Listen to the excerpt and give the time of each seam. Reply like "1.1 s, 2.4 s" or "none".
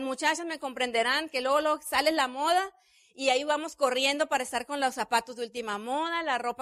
none

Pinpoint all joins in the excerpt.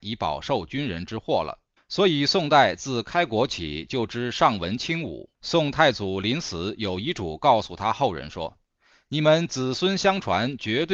1.8 s, 5.3 s

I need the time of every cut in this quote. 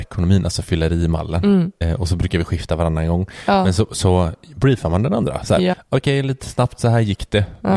none

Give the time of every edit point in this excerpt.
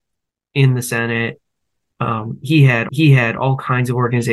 2.9 s

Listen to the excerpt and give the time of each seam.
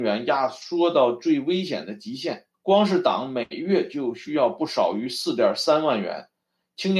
2.5 s

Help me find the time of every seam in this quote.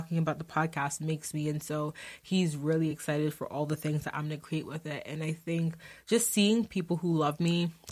none

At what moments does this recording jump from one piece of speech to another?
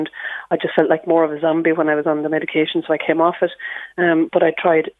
none

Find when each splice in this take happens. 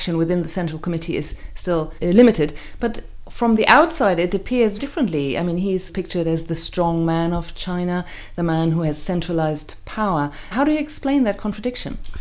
4.8 s

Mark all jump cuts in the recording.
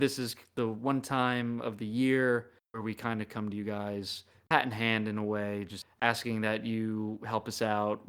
none

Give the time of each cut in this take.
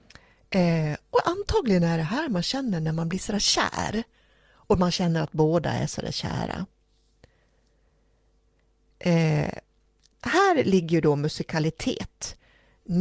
none

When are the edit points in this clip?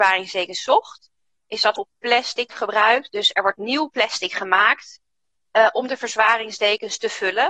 1.8 s, 2.5 s

